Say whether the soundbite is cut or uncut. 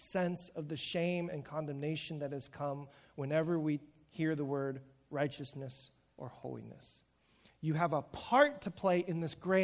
uncut